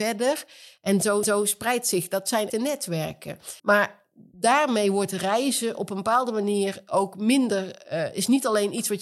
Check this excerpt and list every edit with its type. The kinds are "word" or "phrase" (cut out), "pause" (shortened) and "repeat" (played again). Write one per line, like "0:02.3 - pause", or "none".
0:01.2 - repeat
0:02.5 - word
0:03.6 - pause